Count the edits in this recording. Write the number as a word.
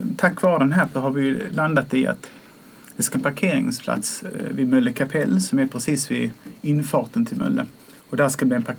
three